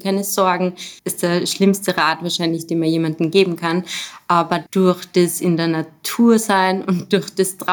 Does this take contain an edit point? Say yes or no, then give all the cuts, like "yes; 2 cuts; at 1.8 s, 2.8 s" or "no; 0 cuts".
yes; 2 cuts; at 1.0 s, 4.7 s